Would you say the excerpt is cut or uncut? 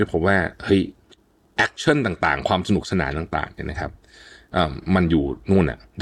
uncut